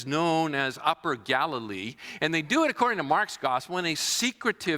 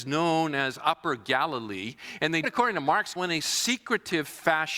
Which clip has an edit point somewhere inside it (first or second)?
second